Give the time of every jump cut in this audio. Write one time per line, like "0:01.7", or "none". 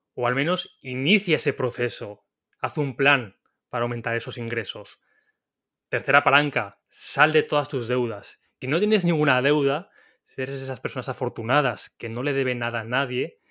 0:06.8
0:08.6